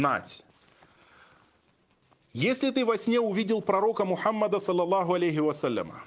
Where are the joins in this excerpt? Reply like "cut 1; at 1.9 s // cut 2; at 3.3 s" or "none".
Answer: none